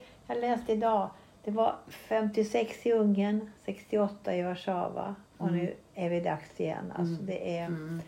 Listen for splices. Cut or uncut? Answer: cut